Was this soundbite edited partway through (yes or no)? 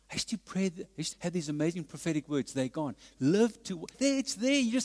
yes